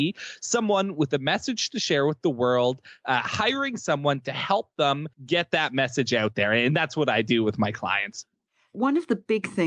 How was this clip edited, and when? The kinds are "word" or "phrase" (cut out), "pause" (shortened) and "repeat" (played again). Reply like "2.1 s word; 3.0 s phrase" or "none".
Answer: 5.1 s pause; 8.5 s pause